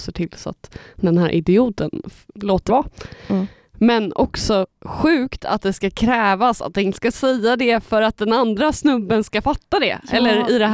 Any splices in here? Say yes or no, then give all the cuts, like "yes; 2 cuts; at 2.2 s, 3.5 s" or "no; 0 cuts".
yes; 3 cuts; at 2.3 s, 2.7 s, 6.9 s